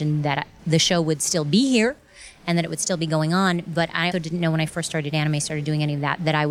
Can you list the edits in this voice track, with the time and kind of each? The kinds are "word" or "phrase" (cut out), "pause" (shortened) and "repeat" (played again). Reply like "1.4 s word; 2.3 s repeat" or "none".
4.1 s word